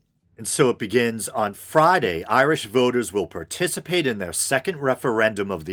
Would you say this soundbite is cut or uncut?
uncut